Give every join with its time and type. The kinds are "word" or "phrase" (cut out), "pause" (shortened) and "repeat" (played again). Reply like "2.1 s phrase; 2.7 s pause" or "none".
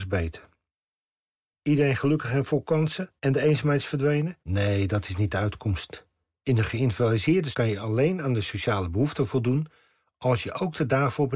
3.2 s pause; 4.4 s pause; 7.5 s word